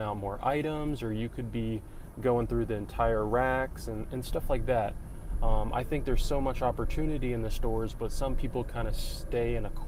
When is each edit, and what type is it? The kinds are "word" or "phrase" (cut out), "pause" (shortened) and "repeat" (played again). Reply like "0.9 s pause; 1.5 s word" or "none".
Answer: none

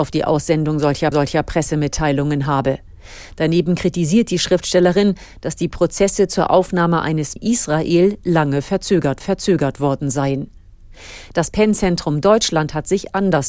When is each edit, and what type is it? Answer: 1.1 s repeat; 7.4 s word; 9.2 s repeat

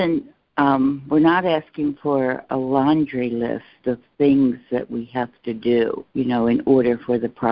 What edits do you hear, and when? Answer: 6.1 s pause

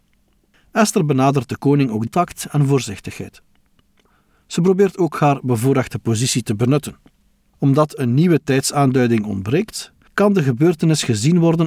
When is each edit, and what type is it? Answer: 2.1 s phrase

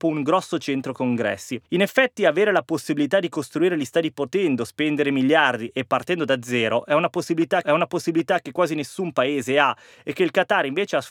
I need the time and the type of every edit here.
1.7 s pause; 7.6 s repeat

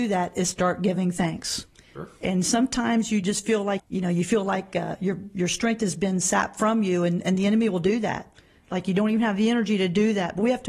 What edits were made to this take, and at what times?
3.8 s phrase

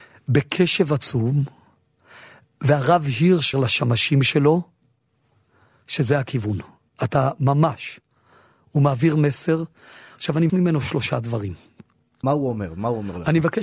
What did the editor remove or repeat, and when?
3.5 s phrase; 10.5 s word; 12.2 s word

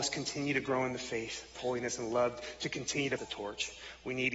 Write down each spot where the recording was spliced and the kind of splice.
1.6 s word; 3.2 s word

